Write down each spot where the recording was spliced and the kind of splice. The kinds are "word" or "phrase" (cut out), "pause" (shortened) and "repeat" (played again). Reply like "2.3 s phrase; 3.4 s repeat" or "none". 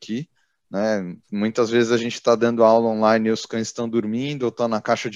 1.2 s pause